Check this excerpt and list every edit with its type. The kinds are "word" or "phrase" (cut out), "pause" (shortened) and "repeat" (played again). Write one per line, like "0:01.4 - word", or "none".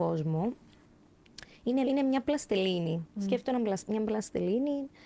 0:01.8 - word
0:03.1 - pause